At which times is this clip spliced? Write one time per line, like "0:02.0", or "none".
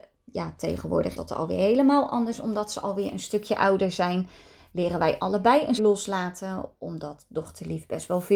0:01.2
0:05.8